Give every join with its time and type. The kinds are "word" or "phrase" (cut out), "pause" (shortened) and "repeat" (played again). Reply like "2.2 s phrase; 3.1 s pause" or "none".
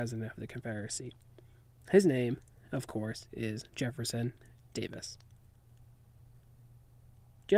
3.7 s pause